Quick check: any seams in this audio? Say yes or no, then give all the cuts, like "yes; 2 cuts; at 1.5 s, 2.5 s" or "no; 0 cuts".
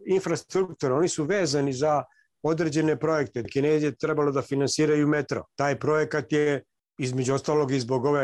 no; 0 cuts